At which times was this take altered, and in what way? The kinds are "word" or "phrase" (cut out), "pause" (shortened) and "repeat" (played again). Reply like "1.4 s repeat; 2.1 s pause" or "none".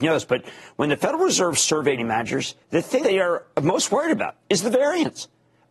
2.0 s word; 2.6 s pause; 3.0 s word